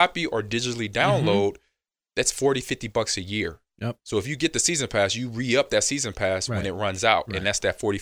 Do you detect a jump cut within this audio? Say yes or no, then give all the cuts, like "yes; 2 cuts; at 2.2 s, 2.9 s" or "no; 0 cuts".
yes; 1 cut; at 4.0 s